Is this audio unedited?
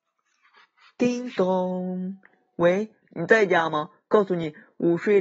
no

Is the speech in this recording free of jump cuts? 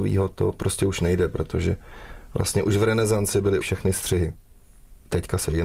no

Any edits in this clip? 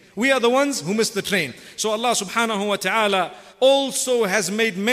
yes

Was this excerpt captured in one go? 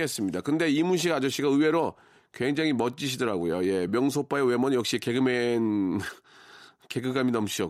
yes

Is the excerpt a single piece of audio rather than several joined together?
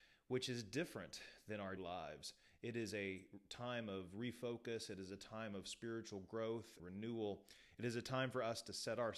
no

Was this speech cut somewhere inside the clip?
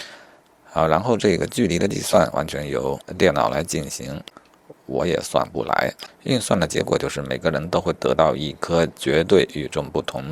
no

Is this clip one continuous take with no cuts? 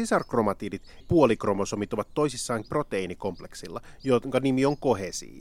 no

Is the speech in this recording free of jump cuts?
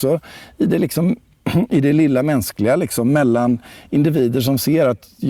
yes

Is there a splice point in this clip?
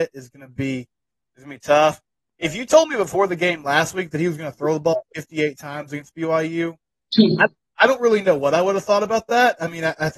no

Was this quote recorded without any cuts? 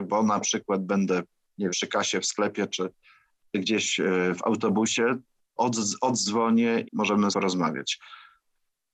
no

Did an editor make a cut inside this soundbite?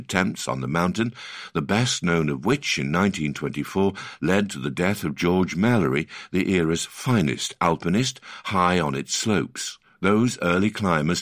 yes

